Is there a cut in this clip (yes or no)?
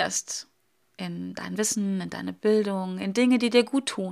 no